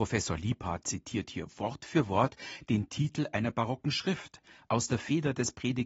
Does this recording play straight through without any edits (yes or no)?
yes